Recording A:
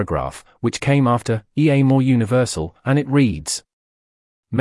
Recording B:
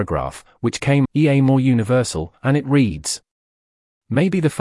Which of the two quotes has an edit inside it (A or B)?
B